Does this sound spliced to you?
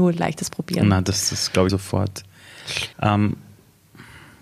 yes; 3 cuts; at 1.3 s, 1.7 s, 2.9 s

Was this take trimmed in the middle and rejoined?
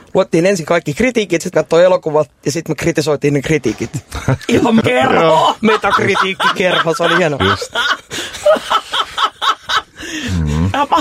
yes; 2 cuts; at 1.5 s, 4.8 s

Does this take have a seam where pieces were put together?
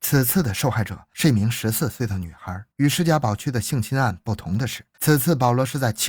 yes; 2 cuts; at 2.7 s, 4.9 s

